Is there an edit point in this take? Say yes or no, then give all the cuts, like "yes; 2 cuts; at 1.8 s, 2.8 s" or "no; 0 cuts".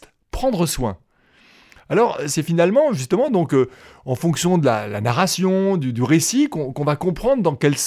no; 0 cuts